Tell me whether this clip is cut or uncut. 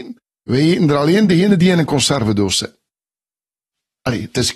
uncut